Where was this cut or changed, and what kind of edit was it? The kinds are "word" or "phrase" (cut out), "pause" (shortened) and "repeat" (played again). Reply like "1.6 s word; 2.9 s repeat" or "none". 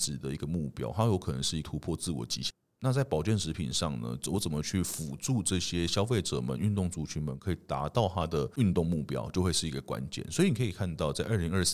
none